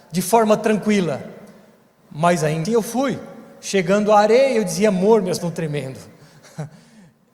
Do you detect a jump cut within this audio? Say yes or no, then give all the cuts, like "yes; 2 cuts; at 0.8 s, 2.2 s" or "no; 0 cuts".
yes; 2 cuts; at 2.6 s, 5.4 s